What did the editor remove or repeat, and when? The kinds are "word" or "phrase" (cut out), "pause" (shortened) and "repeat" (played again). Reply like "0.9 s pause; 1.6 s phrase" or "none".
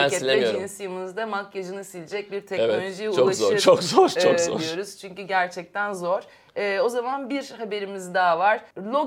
none